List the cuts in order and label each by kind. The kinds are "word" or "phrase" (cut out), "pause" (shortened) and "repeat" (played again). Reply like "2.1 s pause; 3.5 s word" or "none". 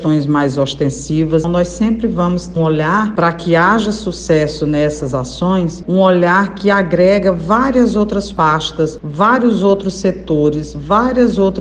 1.4 s word; 2.6 s word